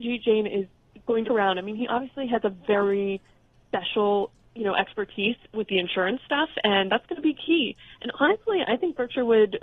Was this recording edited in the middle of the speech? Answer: yes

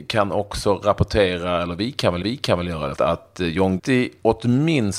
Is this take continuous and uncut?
no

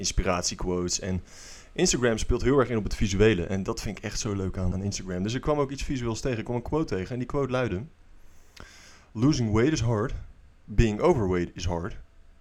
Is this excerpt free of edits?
no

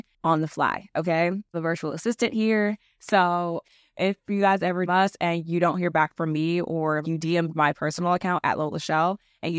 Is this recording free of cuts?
no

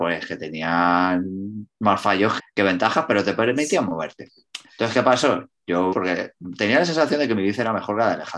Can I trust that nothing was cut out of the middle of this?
no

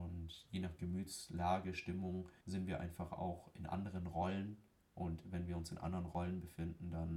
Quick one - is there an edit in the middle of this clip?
yes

